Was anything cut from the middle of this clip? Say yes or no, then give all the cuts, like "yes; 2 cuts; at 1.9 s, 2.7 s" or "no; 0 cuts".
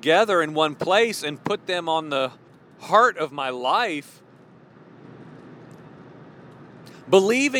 yes; 1 cut; at 2.5 s